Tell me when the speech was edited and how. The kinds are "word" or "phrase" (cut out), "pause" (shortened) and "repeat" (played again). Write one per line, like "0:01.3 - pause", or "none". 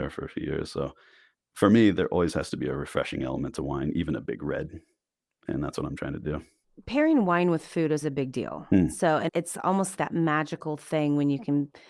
0:01.3 - word
0:08.0 - word
0:09.3 - word
0:10.0 - word

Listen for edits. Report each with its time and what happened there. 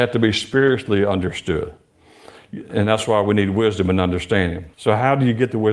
0:04.7 - pause

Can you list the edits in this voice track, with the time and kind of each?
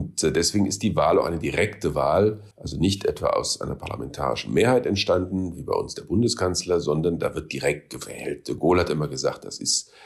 0:02.5 - pause

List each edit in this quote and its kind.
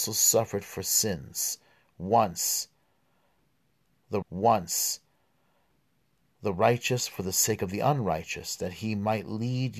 0:04.2 - repeat

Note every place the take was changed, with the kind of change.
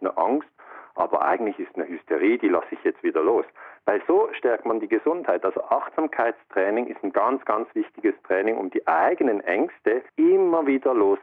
0:10.1 - pause

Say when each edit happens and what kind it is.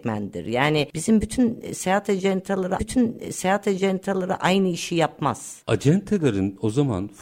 0:02.8 - repeat

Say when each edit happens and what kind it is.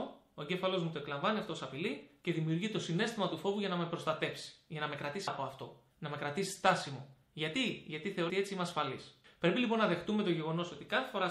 0:05.3 - word
0:05.9 - pause
0:07.2 - pause
0:08.3 - word
0:09.2 - pause

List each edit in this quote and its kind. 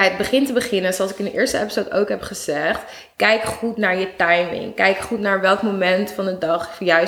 none

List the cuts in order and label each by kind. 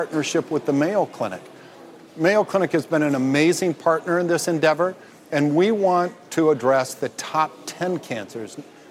none

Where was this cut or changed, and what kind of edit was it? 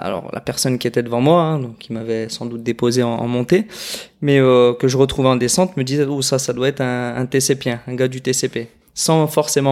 none

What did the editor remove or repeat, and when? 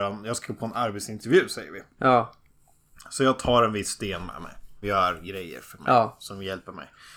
0:04.8 - word

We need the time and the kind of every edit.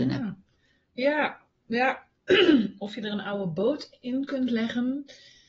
none

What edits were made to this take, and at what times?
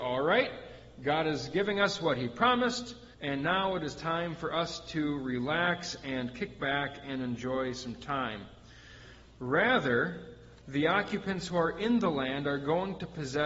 0:03.1 - pause
0:10.6 - pause

